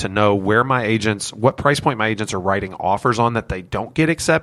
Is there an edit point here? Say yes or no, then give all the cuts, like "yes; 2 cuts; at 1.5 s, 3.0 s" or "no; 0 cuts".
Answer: no; 0 cuts